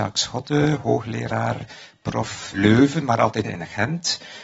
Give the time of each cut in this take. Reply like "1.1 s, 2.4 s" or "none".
2.5 s, 3.4 s